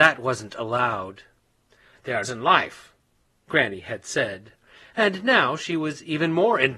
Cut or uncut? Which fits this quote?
cut